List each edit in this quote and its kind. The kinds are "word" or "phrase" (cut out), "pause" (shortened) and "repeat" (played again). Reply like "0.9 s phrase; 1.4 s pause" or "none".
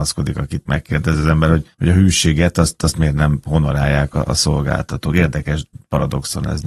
1.7 s pause